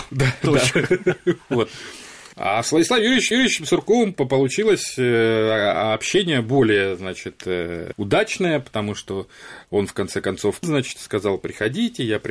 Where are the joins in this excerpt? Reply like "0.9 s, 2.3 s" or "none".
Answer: 3.3 s, 10.6 s